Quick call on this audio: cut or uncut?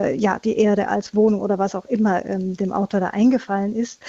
uncut